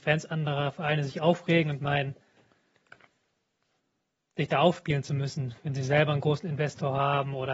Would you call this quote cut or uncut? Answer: cut